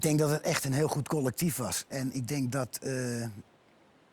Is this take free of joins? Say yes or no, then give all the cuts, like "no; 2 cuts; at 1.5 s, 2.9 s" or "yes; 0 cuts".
yes; 0 cuts